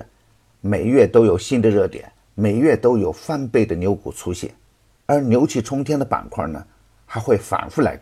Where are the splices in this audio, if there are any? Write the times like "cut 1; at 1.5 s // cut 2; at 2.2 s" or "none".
none